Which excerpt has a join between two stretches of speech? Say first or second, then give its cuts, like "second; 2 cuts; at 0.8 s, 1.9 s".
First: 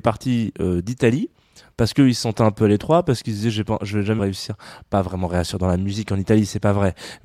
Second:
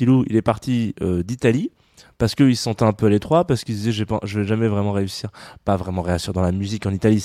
first; 1 cut; at 4.2 s